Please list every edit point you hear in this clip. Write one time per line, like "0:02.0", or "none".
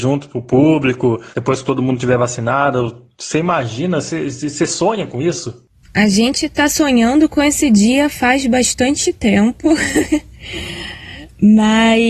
0:01.3